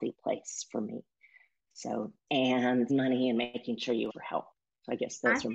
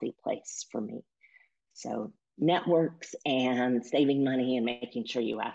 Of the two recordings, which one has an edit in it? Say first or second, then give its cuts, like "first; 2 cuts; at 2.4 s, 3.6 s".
first; 3 cuts; at 2.3 s, 2.9 s, 4.1 s